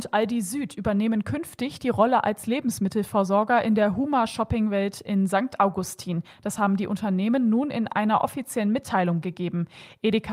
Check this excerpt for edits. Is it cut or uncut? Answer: cut